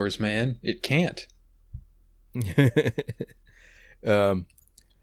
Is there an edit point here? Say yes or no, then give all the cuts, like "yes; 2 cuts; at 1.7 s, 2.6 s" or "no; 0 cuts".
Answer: no; 0 cuts